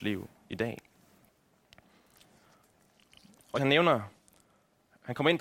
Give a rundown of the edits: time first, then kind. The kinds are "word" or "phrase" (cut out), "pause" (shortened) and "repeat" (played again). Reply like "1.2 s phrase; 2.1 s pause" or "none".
3.6 s word